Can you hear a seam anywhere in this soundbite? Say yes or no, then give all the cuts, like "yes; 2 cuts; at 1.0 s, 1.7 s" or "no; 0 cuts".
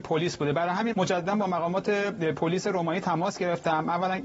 yes; 1 cut; at 0.9 s